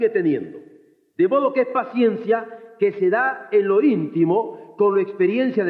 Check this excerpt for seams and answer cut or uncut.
uncut